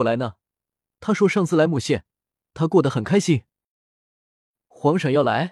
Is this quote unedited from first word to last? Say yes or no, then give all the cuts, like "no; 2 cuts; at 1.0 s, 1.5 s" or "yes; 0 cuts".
yes; 0 cuts